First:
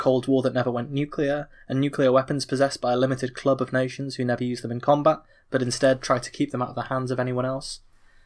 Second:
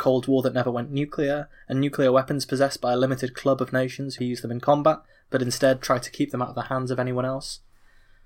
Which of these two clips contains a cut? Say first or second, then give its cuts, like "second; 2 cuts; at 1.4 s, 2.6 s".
second; 1 cut; at 4.2 s